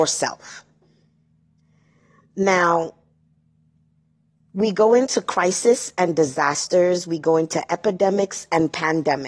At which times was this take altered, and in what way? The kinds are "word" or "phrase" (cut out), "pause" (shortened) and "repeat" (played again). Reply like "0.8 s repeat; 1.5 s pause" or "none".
none